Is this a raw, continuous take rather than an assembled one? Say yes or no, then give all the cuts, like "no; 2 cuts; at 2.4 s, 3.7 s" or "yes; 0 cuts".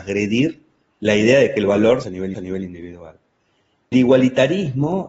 no; 3 cuts; at 2.0 s, 2.3 s, 3.9 s